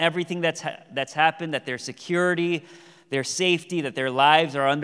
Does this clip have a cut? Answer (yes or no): no